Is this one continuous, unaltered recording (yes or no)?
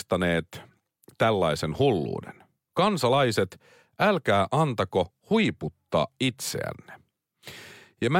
yes